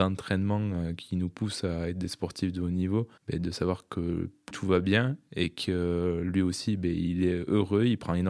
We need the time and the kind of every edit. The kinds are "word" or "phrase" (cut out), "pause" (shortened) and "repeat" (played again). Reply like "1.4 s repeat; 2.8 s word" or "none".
3.2 s pause; 4.5 s word